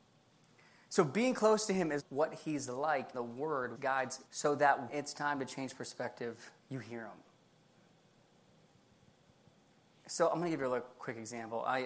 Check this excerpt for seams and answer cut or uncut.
cut